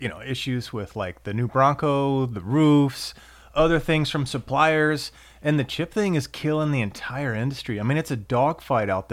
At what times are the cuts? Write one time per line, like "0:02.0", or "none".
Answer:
none